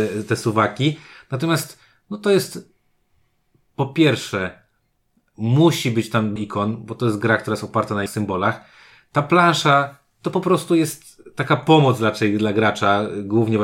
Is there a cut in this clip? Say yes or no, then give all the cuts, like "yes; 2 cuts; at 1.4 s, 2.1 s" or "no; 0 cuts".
yes; 2 cuts; at 6.4 s, 8.1 s